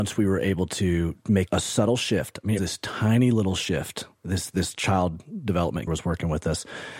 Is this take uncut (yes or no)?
no